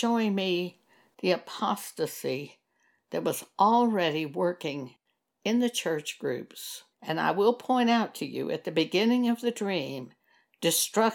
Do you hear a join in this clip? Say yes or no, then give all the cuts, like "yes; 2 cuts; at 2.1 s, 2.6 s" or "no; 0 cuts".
yes; 1 cut; at 6.9 s